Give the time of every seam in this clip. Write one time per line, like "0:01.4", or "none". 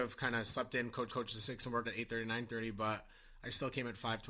0:01.1
0:01.8